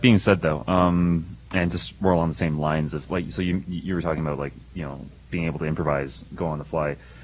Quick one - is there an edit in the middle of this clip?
no; 0 cuts

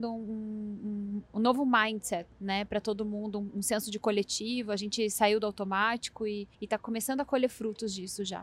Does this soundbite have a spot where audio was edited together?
yes; 1 cut; at 6.5 s

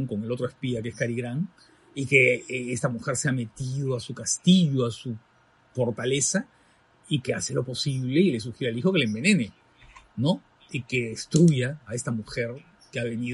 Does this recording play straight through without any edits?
yes; 0 cuts

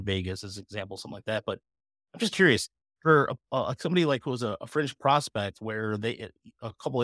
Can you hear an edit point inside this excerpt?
no; 0 cuts

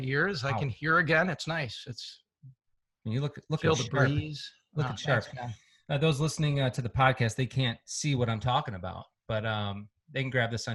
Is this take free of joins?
yes; 0 cuts

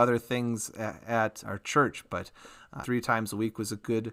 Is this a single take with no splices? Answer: no; 2 cuts; at 1.4 s, 2.8 s

